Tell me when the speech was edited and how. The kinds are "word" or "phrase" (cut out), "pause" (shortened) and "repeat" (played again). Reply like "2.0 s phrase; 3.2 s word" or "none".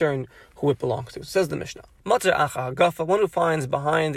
2.0 s pause